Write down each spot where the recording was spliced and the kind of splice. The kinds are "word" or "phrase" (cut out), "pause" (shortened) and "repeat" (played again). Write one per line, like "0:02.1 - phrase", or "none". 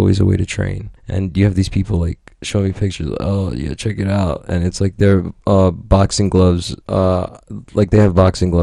0:01.0 - pause
0:05.4 - pause
0:06.8 - pause